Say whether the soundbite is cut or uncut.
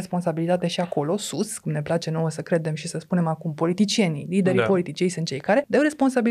uncut